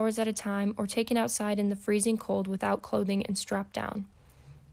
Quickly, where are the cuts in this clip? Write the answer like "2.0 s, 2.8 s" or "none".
none